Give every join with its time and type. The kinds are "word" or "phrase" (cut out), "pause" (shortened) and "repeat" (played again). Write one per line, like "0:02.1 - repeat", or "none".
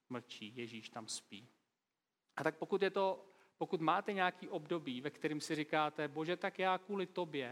none